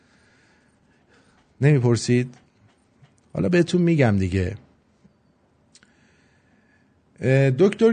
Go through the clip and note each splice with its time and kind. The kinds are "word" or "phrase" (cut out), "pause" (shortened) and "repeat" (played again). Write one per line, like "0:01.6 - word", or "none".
none